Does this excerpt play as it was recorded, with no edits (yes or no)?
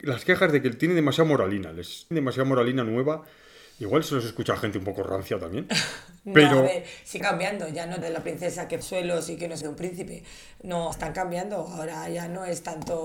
no